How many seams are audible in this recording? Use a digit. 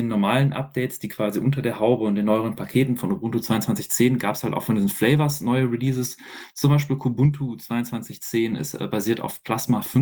0